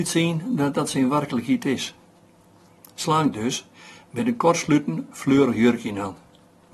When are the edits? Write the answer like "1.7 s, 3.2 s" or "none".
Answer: none

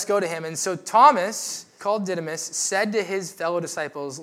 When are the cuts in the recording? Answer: 1.8 s

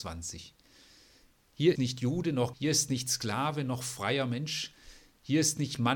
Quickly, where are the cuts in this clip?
1.8 s, 2.5 s

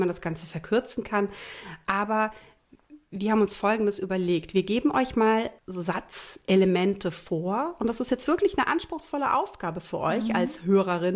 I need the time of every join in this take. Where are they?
5.6 s

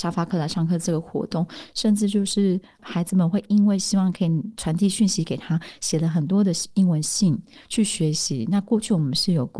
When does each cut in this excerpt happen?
none

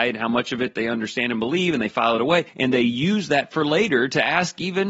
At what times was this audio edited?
2.5 s

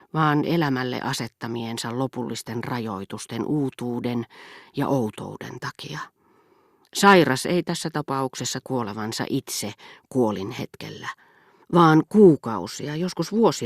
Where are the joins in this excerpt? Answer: 8.6 s

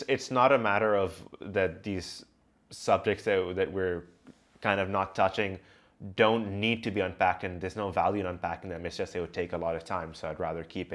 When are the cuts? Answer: none

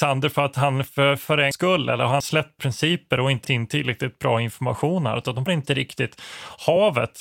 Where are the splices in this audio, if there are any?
1.5 s, 2.2 s, 2.6 s, 3.4 s, 5.5 s

